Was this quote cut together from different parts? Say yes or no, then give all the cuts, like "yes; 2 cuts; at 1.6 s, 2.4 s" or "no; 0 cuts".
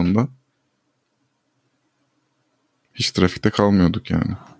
no; 0 cuts